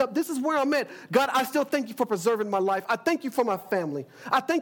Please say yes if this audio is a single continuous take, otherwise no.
yes